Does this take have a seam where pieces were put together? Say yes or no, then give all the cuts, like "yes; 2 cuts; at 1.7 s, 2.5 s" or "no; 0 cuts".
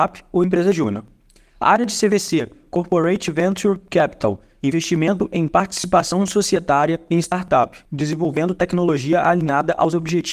yes; 1 cut; at 7.9 s